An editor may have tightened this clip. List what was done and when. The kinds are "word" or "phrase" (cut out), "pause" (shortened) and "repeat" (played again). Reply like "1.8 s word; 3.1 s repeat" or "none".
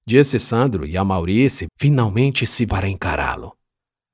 1.7 s word; 2.7 s word